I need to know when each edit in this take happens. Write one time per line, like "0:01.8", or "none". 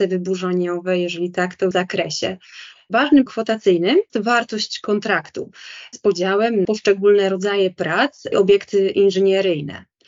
0:01.7
0:03.3
0:04.1
0:05.9
0:06.6
0:08.3